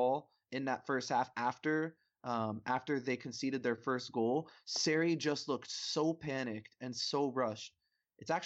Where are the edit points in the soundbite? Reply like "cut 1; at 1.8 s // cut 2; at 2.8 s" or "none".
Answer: none